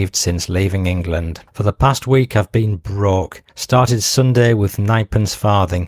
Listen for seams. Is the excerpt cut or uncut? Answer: cut